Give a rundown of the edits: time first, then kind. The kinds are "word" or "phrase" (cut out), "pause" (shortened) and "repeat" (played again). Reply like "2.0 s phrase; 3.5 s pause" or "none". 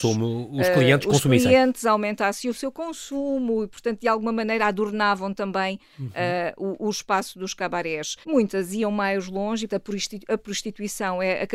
8.2 s pause; 9.7 s word